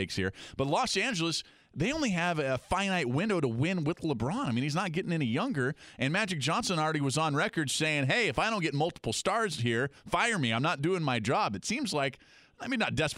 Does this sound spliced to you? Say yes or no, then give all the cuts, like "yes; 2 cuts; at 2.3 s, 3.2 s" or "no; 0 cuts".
no; 0 cuts